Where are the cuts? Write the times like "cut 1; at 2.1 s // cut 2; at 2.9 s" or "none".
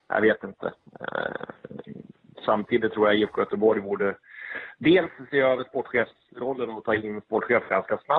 none